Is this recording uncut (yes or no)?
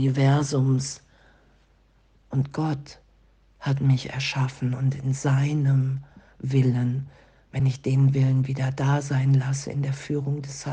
yes